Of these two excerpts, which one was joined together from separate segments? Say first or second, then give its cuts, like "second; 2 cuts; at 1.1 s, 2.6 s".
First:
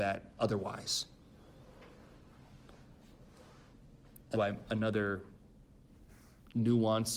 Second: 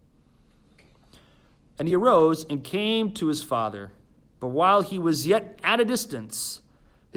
first; 1 cut; at 4.3 s